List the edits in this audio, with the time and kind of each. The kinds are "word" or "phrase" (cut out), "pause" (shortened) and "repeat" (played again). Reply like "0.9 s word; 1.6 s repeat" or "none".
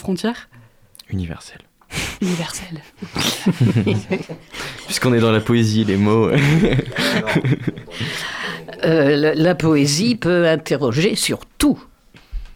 none